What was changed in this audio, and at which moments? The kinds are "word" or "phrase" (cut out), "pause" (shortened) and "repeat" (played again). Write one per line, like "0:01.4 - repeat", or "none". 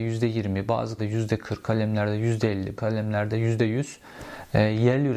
0:01.0 - word
0:01.6 - word
0:02.8 - word